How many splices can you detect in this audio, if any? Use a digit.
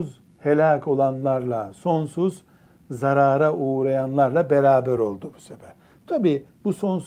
0